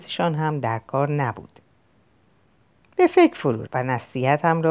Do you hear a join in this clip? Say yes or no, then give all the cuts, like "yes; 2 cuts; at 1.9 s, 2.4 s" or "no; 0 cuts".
yes; 1 cut; at 3.7 s